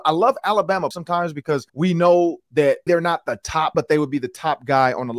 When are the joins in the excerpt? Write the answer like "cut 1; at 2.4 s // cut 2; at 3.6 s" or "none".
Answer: cut 1; at 0.9 s // cut 2; at 1.7 s // cut 3; at 2.9 s // cut 4; at 3.7 s